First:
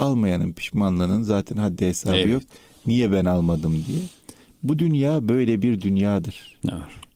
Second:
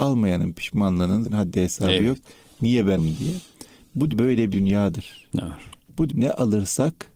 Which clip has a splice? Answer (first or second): second